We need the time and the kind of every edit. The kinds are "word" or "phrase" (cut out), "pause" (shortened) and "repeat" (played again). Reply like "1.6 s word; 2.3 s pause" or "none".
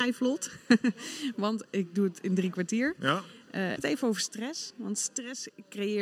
3.8 s phrase